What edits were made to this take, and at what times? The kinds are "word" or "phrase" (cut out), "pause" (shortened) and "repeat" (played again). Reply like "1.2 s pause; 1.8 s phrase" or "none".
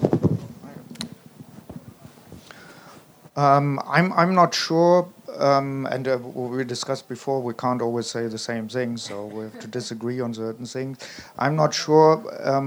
none